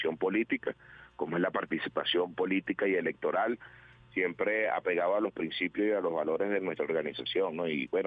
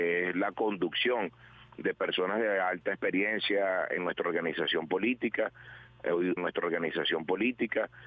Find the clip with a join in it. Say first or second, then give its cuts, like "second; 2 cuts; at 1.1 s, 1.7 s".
second; 1 cut; at 6.4 s